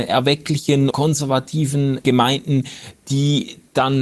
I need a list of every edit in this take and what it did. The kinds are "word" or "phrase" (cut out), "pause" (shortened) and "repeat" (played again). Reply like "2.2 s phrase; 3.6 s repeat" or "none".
0.9 s word; 2.0 s word

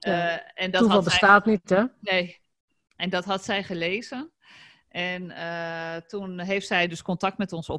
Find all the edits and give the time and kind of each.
none

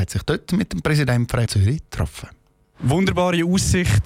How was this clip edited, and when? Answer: 1.5 s phrase

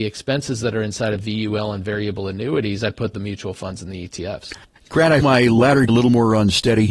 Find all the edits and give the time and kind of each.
3.1 s phrase; 5.2 s word; 5.9 s word

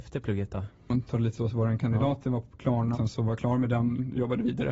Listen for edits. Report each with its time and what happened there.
1.4 s word; 2.9 s word

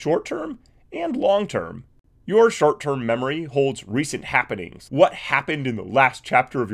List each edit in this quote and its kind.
4.9 s word

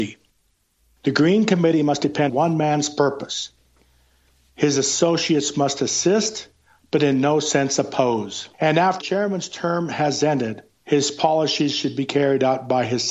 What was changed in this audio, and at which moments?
2.3 s phrase; 8.5 s pause; 9.0 s word; 10.7 s pause

